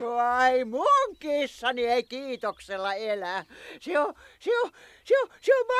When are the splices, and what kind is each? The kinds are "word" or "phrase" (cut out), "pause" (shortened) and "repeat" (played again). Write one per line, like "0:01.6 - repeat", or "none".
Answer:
none